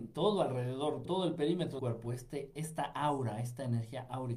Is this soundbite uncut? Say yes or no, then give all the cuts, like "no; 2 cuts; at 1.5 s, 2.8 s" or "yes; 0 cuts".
no; 2 cuts; at 1.0 s, 1.8 s